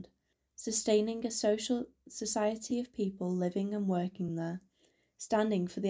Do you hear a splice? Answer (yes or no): no